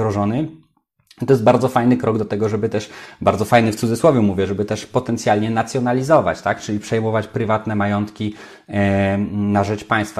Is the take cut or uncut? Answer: uncut